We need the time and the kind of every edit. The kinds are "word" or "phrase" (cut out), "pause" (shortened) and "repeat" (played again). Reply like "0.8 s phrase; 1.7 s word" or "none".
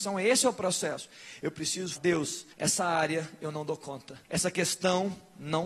2.0 s word; 2.5 s pause; 4.2 s pause